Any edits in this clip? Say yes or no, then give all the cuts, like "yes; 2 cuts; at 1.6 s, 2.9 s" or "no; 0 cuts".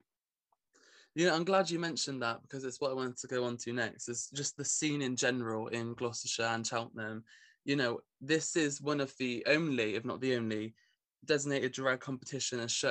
no; 0 cuts